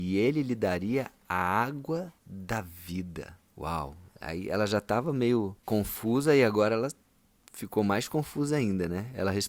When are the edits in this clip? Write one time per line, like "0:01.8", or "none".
0:02.2
0:03.5
0:05.6